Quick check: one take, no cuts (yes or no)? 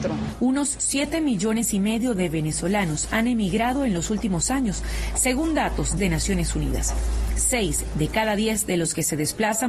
no